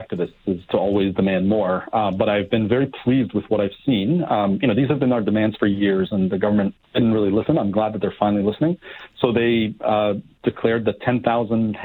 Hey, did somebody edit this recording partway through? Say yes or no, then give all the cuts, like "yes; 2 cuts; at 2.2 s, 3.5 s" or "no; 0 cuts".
no; 0 cuts